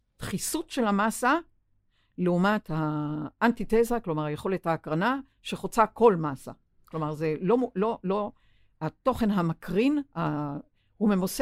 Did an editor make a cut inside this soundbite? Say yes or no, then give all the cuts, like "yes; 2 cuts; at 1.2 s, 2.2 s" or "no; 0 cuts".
no; 0 cuts